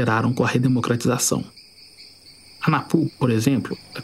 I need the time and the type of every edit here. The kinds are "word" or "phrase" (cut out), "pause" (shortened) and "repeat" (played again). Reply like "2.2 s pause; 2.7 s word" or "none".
none